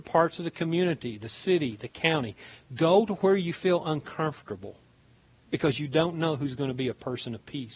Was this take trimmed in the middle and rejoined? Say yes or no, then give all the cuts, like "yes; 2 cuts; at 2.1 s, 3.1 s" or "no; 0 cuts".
no; 0 cuts